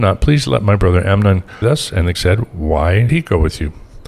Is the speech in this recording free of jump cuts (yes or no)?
no